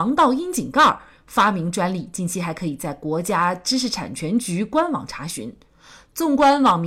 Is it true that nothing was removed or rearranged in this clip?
yes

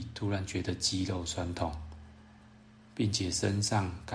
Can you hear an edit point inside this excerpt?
no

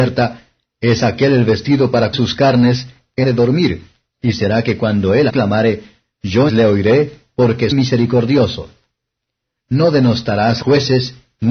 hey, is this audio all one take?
no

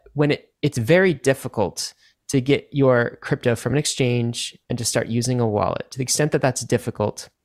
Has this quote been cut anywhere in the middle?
no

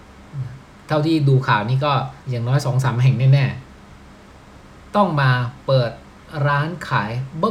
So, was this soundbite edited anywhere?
yes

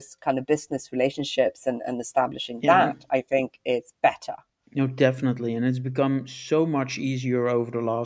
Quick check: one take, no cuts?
yes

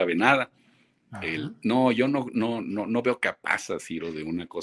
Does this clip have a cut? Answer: no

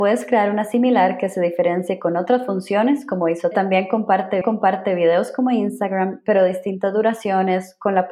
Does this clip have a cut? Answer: yes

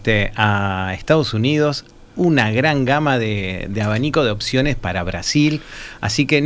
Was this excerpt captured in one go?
yes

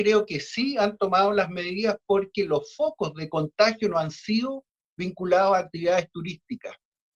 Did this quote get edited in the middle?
no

